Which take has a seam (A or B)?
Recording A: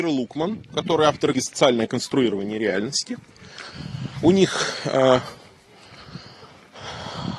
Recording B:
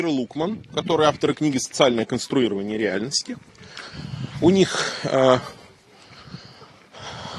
A